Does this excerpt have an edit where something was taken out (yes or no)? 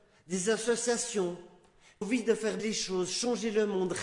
yes